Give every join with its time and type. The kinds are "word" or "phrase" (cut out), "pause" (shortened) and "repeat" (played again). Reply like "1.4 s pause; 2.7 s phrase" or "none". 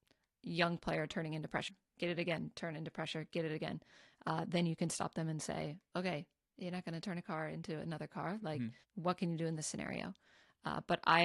8.8 s pause